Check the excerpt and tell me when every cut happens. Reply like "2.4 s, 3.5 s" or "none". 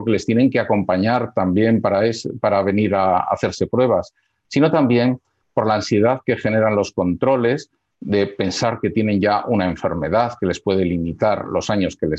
none